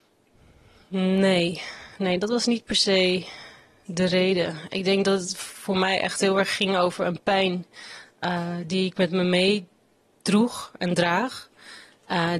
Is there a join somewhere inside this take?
no; 0 cuts

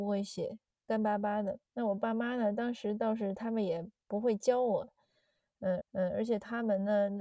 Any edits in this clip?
yes; 2 cuts; at 1.7 s, 5.8 s

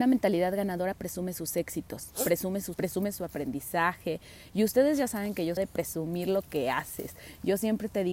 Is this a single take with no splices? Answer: no; 2 cuts; at 2.7 s, 5.6 s

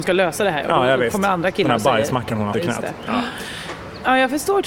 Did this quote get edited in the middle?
yes; 1 cut; at 2.5 s

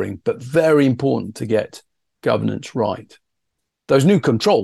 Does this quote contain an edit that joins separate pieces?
no; 0 cuts

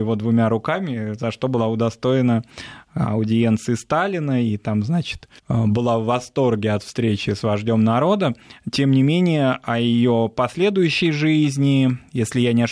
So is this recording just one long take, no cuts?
no; 1 cut; at 5.4 s

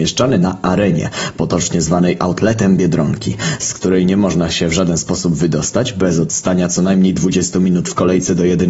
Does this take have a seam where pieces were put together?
no; 0 cuts

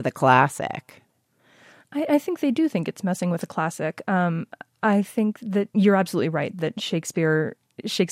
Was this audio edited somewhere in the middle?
no; 0 cuts

